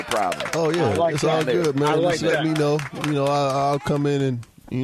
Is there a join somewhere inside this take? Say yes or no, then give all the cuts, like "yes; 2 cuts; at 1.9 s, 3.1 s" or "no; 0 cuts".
no; 0 cuts